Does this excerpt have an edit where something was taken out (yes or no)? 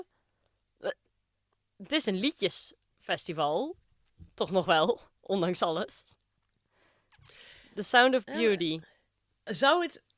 no